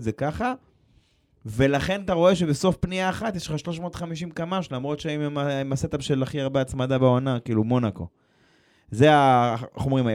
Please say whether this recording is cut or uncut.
cut